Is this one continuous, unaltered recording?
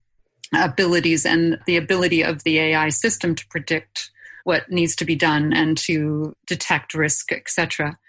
no; 2 cuts; at 4.4 s, 6.4 s

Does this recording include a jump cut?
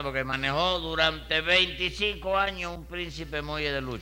no; 0 cuts

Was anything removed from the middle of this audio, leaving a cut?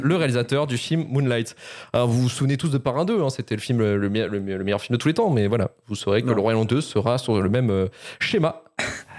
no; 0 cuts

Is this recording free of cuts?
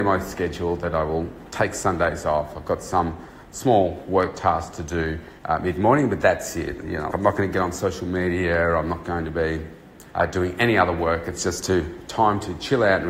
no; 4 cuts; at 5.4 s, 6.2 s, 7.1 s, 10.1 s

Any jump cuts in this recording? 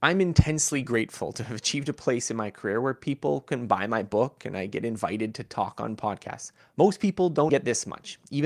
yes; 1 cut; at 7.5 s

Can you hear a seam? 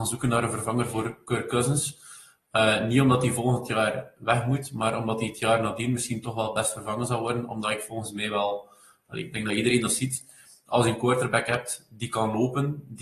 no; 0 cuts

